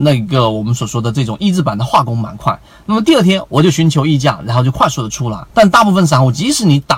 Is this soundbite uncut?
no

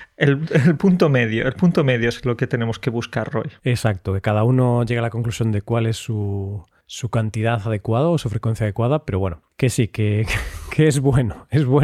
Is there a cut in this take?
yes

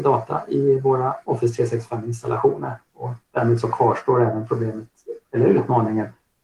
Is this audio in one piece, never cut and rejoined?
yes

